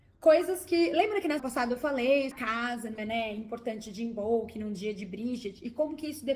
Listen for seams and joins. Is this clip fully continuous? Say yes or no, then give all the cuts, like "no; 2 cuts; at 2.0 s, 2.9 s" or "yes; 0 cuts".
no; 3 cuts; at 1.4 s, 2.3 s, 3.0 s